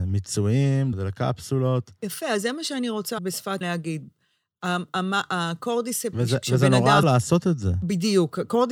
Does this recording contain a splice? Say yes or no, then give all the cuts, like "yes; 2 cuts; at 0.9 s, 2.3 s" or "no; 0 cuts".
yes; 5 cuts; at 0.9 s, 3.2 s, 3.6 s, 6.1 s, 7.0 s